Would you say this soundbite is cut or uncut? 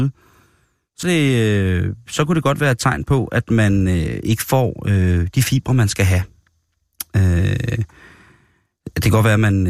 cut